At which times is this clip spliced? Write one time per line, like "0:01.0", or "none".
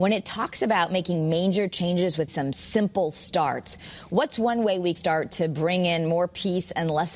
0:02.3
0:04.9